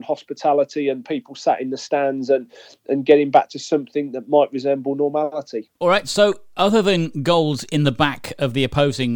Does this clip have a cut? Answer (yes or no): no